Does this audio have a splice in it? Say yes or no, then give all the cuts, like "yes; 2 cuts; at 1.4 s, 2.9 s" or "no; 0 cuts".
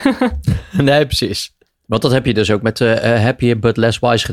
yes; 1 cut; at 1.7 s